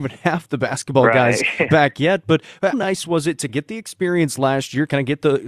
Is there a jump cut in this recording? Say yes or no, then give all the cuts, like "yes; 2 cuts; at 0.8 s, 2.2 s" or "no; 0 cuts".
yes; 3 cuts; at 1.7 s, 2.7 s, 3.5 s